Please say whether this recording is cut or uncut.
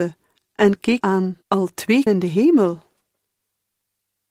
cut